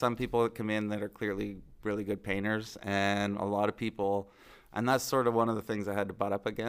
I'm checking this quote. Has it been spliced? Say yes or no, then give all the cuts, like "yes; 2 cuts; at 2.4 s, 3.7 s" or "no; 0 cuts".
no; 0 cuts